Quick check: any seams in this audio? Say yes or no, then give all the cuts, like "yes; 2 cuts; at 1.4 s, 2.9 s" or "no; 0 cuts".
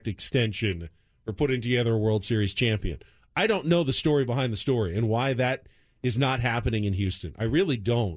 no; 0 cuts